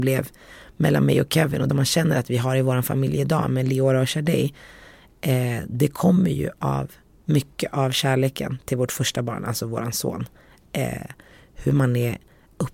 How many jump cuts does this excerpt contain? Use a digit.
1